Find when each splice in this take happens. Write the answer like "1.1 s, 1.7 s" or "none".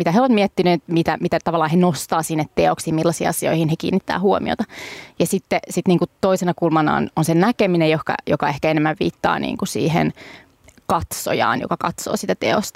none